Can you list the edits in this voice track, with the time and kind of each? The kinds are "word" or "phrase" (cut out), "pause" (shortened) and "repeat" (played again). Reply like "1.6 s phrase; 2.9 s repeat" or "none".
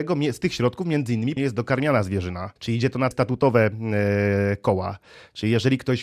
1.4 s word; 2.6 s pause; 3.1 s word